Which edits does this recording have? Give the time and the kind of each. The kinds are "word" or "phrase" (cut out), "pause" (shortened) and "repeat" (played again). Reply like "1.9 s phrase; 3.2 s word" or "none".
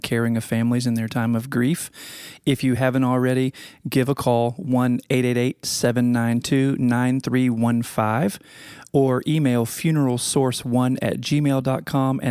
none